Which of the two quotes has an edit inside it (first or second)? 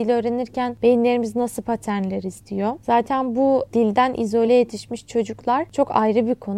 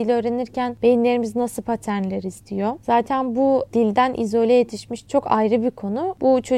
second